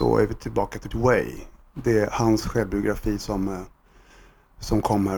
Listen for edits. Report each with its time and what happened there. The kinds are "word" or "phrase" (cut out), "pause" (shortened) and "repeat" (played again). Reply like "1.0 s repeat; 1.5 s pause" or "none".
0.9 s word